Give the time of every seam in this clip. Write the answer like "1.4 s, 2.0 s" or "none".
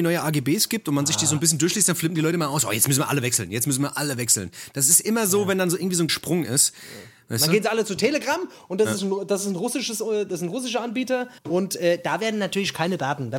6.1 s, 11.4 s